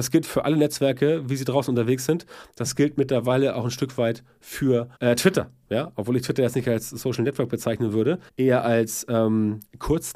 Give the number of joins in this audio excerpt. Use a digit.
2